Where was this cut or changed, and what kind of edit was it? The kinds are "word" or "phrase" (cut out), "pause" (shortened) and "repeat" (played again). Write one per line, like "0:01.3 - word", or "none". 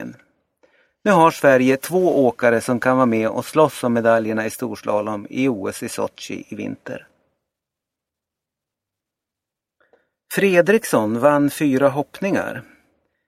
none